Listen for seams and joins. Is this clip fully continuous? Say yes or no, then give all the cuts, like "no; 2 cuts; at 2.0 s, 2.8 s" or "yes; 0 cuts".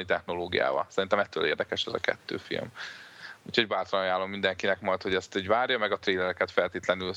yes; 0 cuts